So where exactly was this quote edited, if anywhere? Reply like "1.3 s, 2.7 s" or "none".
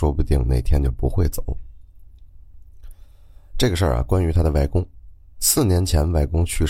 none